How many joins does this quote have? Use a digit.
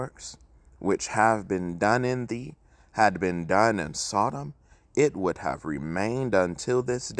0